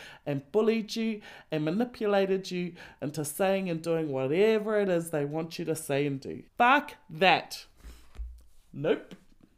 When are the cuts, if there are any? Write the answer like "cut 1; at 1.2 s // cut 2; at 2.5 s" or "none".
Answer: cut 1; at 6.5 s

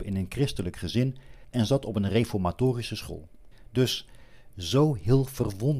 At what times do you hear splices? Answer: none

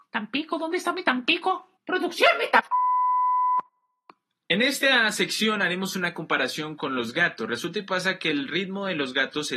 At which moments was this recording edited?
cut 1; at 1.8 s

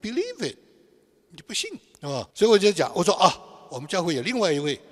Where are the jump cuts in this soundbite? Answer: cut 1; at 1.9 s // cut 2; at 2.3 s

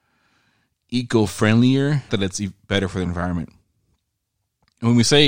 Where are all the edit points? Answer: cut 1; at 2.1 s

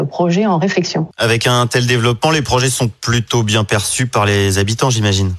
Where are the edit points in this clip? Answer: cut 1; at 1.1 s

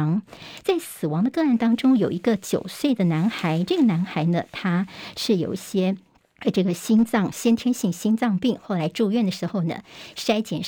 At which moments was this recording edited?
cut 1; at 6.2 s

